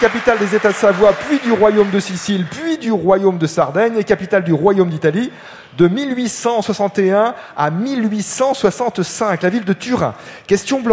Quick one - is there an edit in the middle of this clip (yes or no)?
no